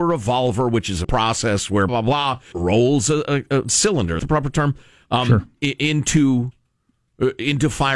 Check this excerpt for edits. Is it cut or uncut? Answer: cut